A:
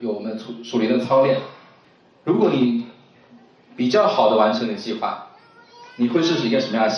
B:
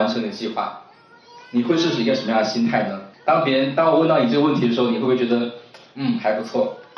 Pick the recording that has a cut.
B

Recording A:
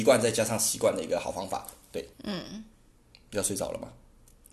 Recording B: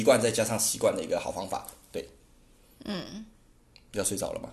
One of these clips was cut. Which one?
A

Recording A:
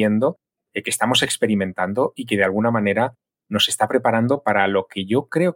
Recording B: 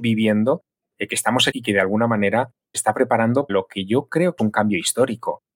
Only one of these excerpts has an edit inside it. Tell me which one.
B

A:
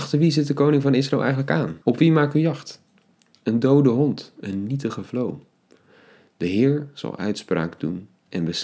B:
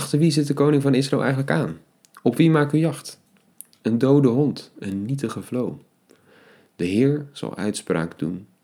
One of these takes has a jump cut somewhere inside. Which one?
A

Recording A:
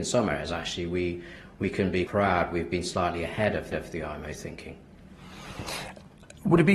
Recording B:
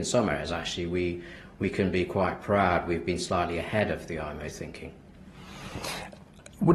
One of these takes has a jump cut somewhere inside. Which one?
A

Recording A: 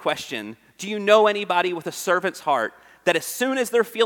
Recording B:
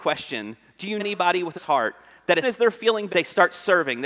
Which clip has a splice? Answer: B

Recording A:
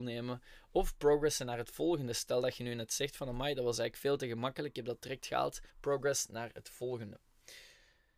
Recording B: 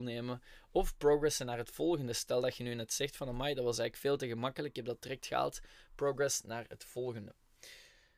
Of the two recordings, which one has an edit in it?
A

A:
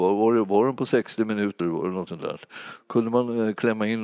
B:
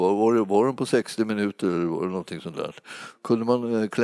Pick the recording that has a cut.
A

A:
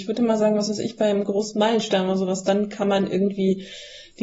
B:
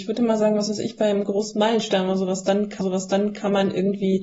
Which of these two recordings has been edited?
B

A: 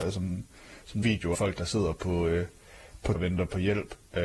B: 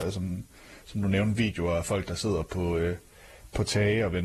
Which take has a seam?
A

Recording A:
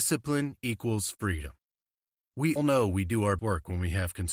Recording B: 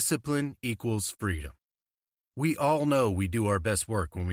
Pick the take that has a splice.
A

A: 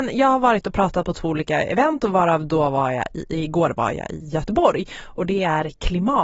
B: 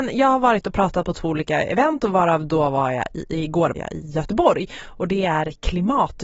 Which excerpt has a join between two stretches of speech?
B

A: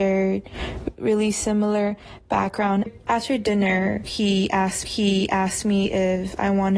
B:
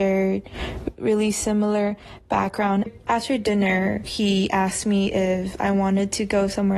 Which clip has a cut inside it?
A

